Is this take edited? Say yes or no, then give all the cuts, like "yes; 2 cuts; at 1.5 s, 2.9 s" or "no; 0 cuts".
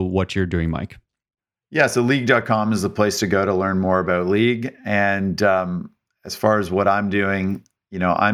no; 0 cuts